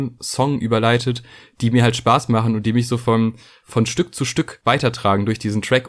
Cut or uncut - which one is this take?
uncut